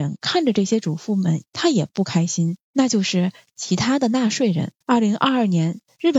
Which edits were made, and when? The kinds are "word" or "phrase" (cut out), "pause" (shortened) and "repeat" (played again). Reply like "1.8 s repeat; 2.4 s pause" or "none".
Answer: 2.6 s pause; 4.8 s pause